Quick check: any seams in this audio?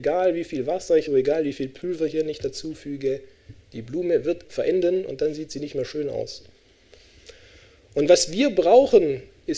yes; 2 cuts; at 1.1 s, 4.4 s

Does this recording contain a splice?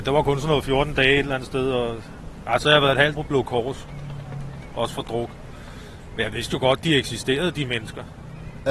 yes; 1 cut; at 3.1 s

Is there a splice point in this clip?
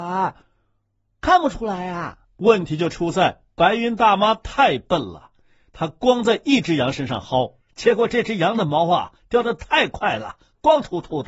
no; 0 cuts

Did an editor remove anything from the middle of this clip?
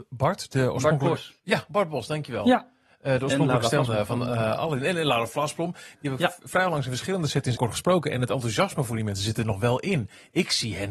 yes; 2 cuts; at 3.9 s, 7.5 s

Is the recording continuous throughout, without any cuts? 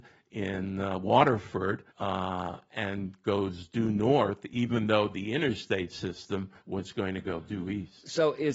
no; 2 cuts; at 1.9 s, 6.6 s

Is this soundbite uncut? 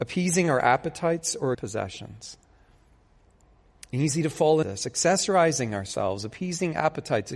no; 2 cuts; at 1.5 s, 4.6 s

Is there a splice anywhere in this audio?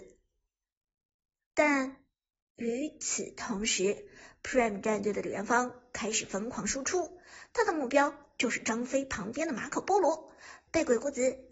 no; 0 cuts

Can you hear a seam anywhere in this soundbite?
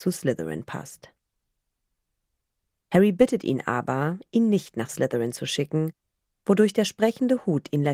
no; 0 cuts

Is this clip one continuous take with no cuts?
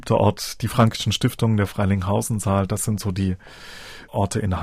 yes; 0 cuts

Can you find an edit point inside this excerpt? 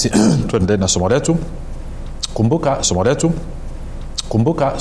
yes; 1 cut; at 2.8 s

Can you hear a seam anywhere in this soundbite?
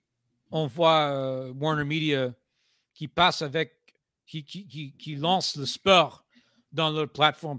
no; 0 cuts

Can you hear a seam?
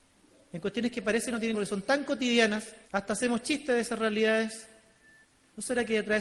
yes; 2 cuts; at 1.5 s, 2.8 s

